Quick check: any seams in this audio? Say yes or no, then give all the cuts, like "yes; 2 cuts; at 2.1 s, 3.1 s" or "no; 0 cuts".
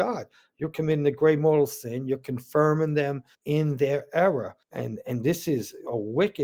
yes; 2 cuts; at 3.3 s, 4.6 s